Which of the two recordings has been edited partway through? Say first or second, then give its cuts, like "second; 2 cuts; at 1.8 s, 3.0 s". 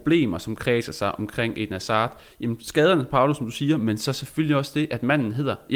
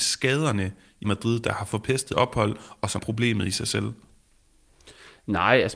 second; 3 cuts; at 1.0 s, 2.1 s, 3.0 s